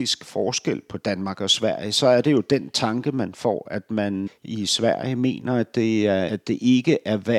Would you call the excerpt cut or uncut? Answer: cut